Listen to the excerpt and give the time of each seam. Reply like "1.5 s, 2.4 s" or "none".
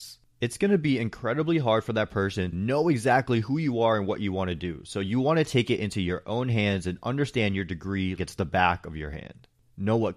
2.5 s, 8.2 s